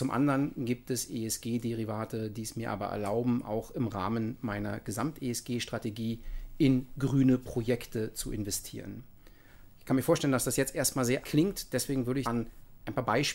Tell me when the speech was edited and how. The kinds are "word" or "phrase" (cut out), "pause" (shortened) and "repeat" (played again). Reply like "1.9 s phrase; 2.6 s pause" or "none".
11.2 s word; 12.2 s word